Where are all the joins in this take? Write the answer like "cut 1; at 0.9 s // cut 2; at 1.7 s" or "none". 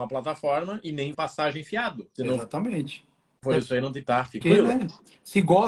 cut 1; at 1.1 s // cut 2; at 2.1 s // cut 3; at 4.0 s // cut 4; at 4.4 s